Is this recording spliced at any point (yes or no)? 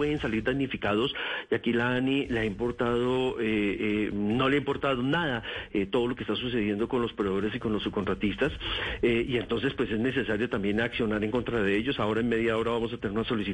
no